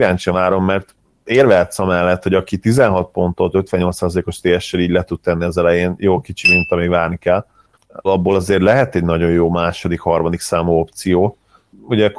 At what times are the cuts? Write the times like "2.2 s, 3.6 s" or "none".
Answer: 8.0 s